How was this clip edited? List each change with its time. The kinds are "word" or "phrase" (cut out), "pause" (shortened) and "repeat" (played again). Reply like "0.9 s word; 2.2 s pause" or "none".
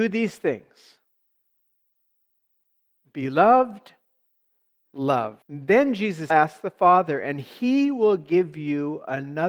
4.9 s word; 5.4 s pause; 6.3 s phrase

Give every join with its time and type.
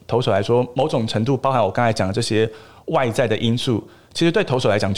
none

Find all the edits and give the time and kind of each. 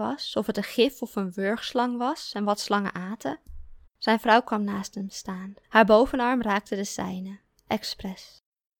3.9 s pause; 5.6 s pause

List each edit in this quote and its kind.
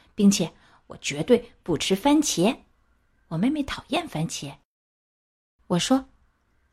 none

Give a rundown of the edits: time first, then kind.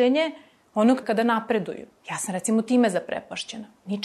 1.0 s word

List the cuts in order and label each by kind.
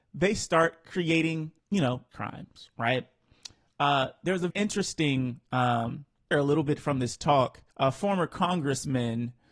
1.6 s pause; 2.1 s word; 4.5 s word; 6.3 s phrase; 7.7 s pause

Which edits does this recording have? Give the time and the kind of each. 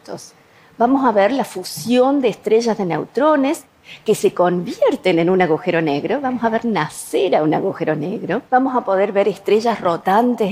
8.5 s pause

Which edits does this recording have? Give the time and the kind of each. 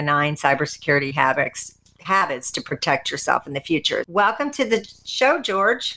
4.0 s word

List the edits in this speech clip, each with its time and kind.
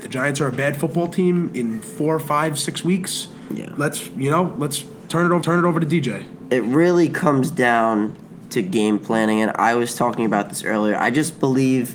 5.4 s repeat

